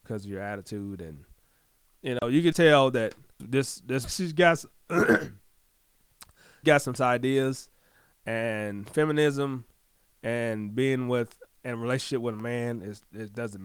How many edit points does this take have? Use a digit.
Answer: 6